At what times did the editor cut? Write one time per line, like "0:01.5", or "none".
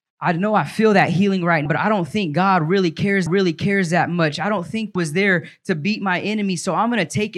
0:01.7
0:03.3
0:05.0